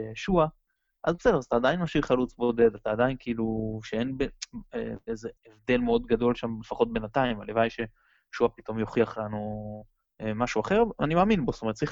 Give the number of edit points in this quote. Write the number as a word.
one